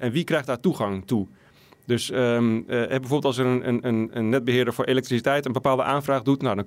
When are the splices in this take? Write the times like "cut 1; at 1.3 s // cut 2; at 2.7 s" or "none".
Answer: none